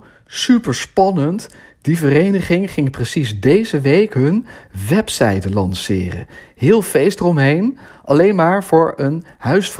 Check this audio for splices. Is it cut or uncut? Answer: uncut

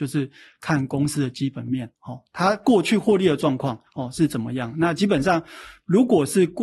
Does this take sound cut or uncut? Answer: cut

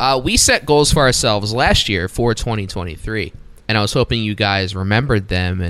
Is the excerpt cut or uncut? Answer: cut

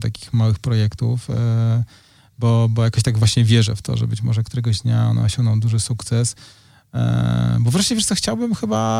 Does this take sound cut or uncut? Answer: uncut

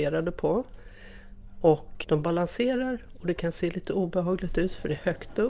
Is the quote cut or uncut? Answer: cut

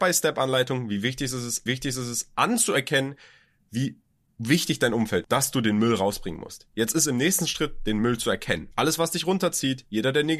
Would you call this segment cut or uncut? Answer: cut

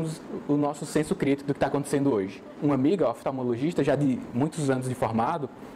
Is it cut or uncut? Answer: uncut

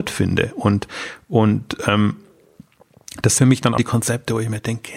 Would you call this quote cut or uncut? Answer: cut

